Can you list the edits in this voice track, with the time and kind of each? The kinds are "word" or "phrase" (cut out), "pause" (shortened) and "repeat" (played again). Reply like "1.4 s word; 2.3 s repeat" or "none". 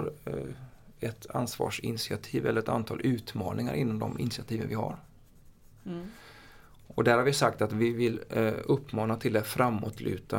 none